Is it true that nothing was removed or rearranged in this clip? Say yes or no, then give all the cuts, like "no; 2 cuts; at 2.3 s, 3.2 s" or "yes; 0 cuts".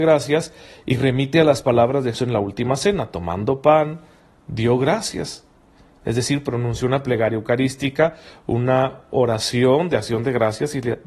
no; 1 cut; at 2.1 s